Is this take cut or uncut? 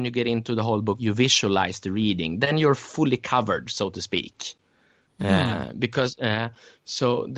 uncut